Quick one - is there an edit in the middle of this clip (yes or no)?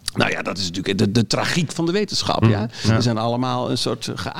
no